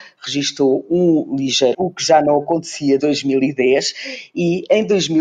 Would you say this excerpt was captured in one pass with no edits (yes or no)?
no